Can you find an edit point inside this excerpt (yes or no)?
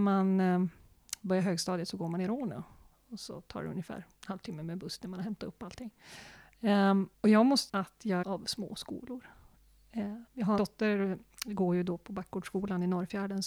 yes